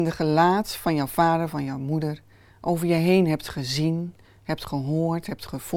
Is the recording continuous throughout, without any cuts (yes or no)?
yes